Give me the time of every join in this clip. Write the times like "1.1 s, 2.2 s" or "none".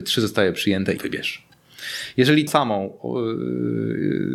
1.0 s, 2.5 s

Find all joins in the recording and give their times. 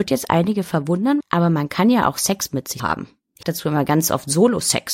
1.2 s, 2.8 s, 3.4 s

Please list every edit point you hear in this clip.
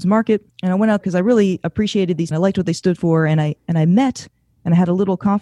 1.0 s, 2.3 s

